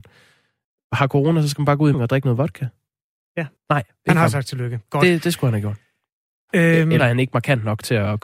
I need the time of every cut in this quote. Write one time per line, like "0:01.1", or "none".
0:01.9
0:03.6
0:07.0